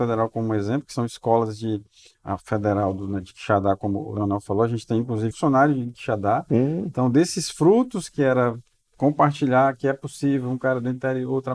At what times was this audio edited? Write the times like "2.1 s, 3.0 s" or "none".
5.3 s